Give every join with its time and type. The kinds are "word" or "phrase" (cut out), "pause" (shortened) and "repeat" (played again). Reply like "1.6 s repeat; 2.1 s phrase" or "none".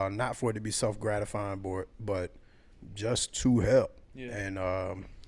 4.0 s pause

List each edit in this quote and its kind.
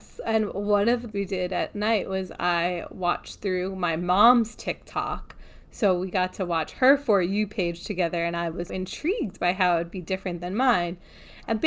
1.1 s phrase; 8.7 s word

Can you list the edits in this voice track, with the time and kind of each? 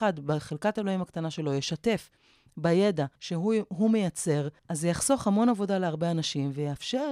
3.2 s pause; 4.6 s pause

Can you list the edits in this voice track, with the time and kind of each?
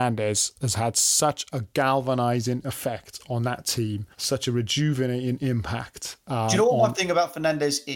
4.1 s pause; 6.9 s word

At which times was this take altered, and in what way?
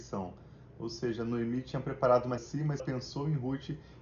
2.4 s phrase; 2.8 s word

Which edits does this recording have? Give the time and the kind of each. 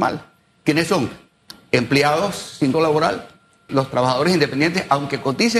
2.7 s word; 3.7 s word

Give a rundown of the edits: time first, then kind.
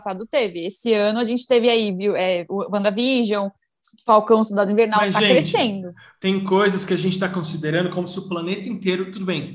none

